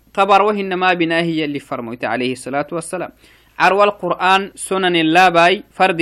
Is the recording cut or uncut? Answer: cut